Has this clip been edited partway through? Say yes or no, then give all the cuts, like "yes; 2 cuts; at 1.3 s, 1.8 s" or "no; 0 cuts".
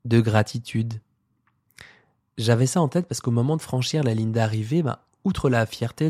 no; 0 cuts